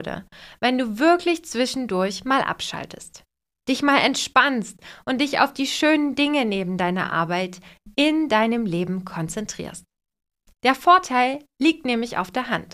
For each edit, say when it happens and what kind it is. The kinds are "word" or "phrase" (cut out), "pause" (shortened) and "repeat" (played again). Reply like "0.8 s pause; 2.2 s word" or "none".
none